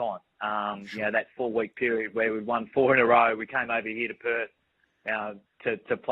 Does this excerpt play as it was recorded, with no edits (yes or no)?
yes